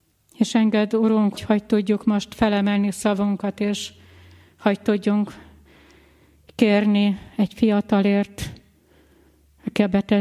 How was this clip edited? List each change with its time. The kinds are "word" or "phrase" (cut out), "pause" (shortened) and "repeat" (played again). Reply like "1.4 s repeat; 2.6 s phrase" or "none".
1.3 s word